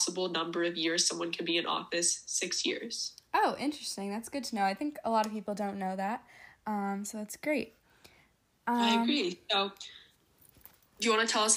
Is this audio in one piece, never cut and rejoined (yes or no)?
yes